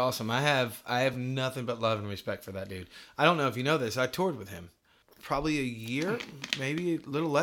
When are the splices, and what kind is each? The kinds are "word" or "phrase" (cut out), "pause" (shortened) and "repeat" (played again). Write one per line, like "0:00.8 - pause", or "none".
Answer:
none

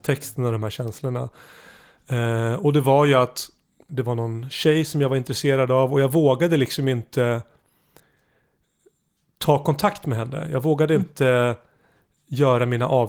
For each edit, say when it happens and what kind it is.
0:03.9 - word

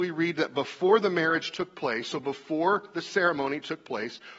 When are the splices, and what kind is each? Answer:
none

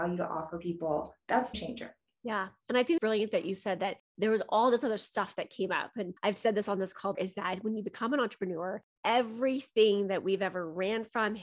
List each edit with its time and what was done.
0:01.5 - phrase
0:03.0 - word
0:06.2 - pause
0:07.1 - word
0:09.0 - word

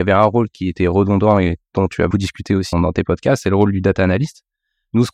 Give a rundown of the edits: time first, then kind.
0:02.1 - word
0:02.7 - word

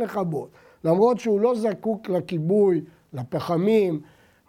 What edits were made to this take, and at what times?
none

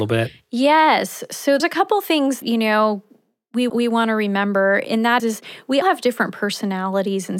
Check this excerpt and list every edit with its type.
0:01.6 - word
0:02.4 - word
0:03.7 - word
0:04.8 - word
0:05.2 - word
0:05.8 - word

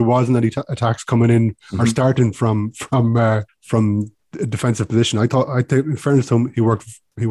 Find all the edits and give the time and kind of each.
0:03.5 - pause

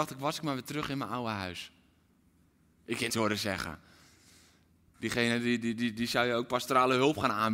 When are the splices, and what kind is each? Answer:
0:03.1 - phrase

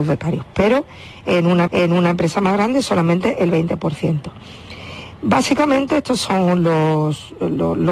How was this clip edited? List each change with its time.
0:01.7 - repeat

